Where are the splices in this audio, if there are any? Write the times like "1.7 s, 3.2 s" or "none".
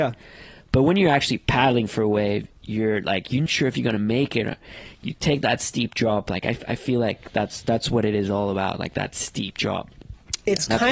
3.5 s

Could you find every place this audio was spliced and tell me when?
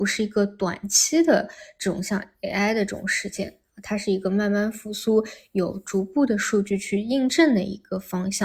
none

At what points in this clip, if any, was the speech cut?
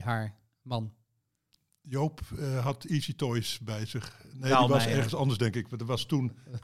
none

